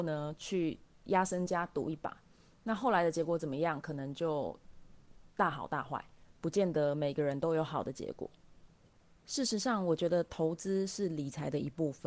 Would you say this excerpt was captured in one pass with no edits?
yes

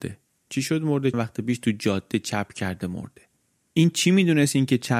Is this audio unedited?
no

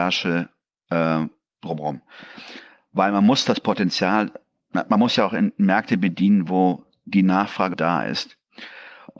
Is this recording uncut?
no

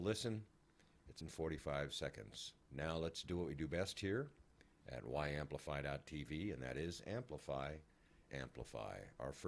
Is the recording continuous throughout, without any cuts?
no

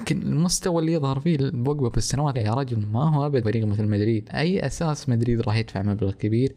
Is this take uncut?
no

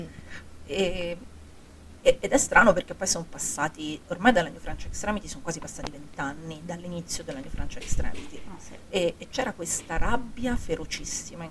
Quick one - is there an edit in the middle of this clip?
no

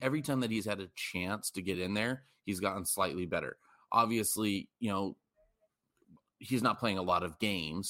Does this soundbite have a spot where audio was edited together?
no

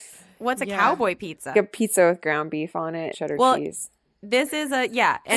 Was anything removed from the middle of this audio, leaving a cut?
yes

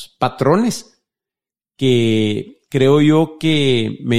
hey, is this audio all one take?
yes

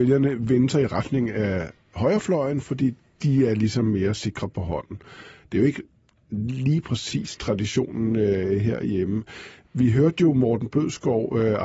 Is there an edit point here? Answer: no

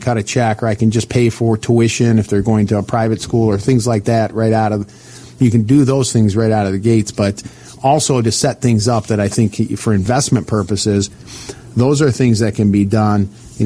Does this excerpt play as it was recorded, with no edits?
yes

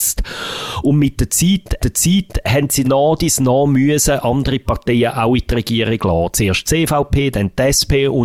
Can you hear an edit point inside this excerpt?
yes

